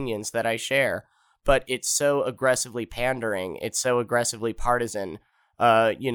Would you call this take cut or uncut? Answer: uncut